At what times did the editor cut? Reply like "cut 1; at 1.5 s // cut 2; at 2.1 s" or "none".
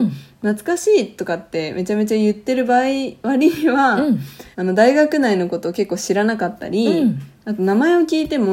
cut 1; at 4.5 s